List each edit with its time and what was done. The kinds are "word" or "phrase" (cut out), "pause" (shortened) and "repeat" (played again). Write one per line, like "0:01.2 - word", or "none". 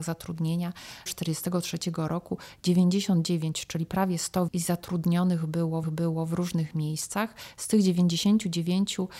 0:01.1 - phrase
0:04.5 - word
0:05.8 - repeat